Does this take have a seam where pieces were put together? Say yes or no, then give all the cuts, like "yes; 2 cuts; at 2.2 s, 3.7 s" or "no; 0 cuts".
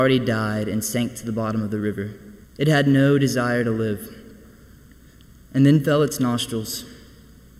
yes; 1 cut; at 2.4 s